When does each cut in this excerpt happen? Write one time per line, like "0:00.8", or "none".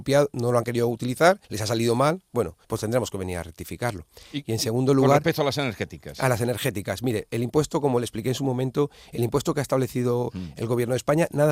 0:01.4
0:02.6

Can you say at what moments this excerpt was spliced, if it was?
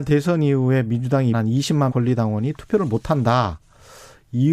0:01.3
0:01.9

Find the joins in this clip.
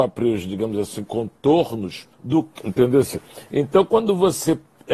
0:02.1
0:02.6

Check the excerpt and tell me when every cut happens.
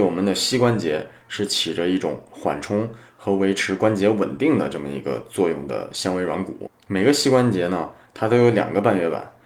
none

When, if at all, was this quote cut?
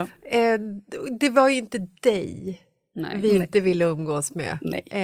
none

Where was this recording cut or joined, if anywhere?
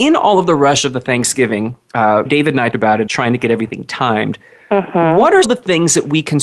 0:02.3
0:02.7
0:03.1
0:05.4

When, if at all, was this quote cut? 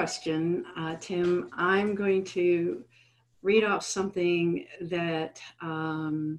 none

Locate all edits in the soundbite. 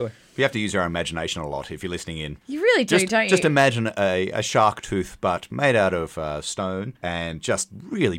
0:02.4
0:07.0

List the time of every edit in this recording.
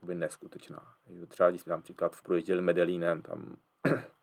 0:01.7
0:02.2

